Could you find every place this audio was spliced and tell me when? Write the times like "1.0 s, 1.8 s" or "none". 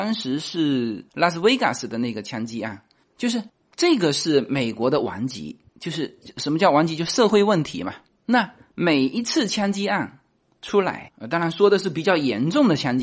1.1 s